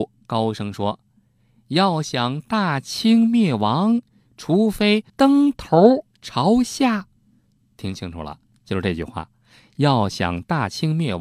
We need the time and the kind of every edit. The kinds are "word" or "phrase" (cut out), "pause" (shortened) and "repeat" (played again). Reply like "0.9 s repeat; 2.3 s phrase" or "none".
5.1 s pause; 7.2 s pause